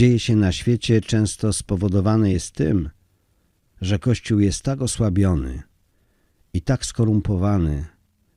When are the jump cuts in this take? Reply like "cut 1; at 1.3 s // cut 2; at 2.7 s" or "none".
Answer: none